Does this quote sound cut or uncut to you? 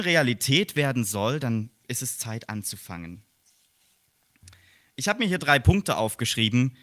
uncut